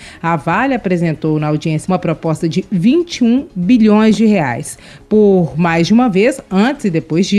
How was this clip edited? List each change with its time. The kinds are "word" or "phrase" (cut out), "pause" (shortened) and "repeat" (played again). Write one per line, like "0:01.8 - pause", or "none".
0:01.8 - word